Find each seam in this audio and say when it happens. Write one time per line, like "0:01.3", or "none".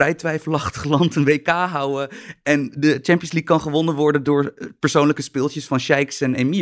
none

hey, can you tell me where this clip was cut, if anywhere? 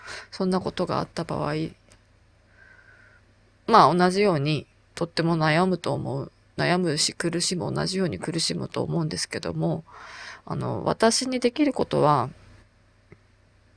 0:04.7

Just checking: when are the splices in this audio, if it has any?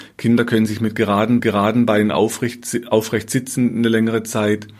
0:01.4

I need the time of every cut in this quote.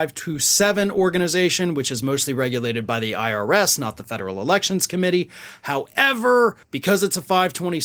0:06.6

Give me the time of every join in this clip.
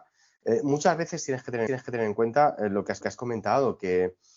0:01.7
0:03.0

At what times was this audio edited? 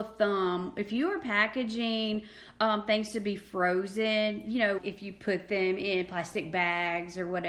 0:04.8

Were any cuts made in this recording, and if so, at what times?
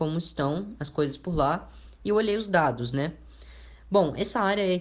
none

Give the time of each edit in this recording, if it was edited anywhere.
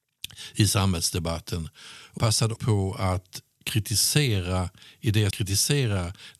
0:02.2
0:02.6
0:03.6
0:05.3

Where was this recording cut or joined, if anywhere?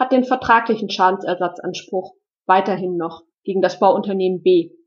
none

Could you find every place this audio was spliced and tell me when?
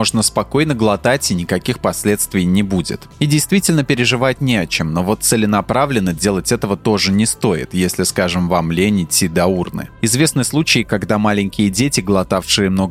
none

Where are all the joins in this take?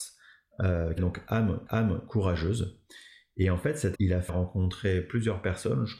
0:01.0
0:01.7
0:03.9
0:04.3

